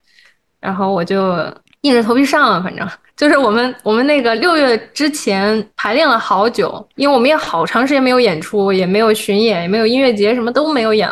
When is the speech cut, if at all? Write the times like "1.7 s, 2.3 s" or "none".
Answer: 1.6 s, 6.9 s